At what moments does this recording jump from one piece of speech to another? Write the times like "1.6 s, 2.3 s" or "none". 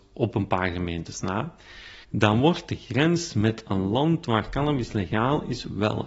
2.0 s